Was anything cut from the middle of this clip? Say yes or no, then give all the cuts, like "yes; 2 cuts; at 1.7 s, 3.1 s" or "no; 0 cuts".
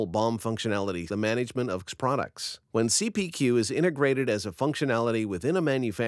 yes; 3 cuts; at 1.1 s, 1.9 s, 2.7 s